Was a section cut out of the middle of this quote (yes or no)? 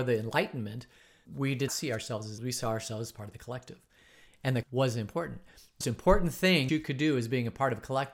yes